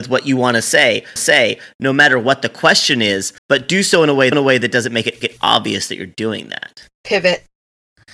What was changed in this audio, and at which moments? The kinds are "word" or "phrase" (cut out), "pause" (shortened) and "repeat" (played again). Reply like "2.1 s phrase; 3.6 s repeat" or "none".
1.2 s repeat; 3.4 s pause; 4.3 s repeat; 5.2 s repeat